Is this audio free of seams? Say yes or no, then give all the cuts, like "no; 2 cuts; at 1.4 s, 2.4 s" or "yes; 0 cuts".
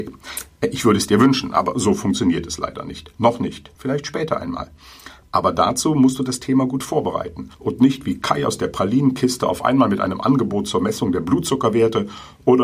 no; 2 cuts; at 3.7 s, 7.5 s